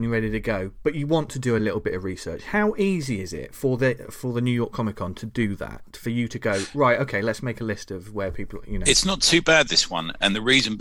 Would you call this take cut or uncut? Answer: uncut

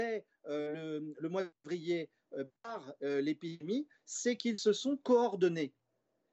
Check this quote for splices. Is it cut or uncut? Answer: uncut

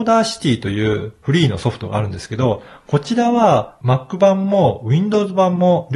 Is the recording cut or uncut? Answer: uncut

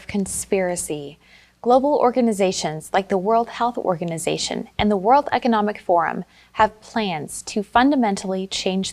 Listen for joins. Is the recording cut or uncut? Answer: uncut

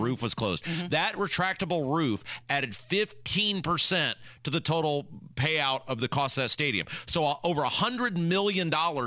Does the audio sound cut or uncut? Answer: uncut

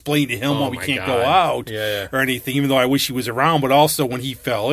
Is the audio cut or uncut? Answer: uncut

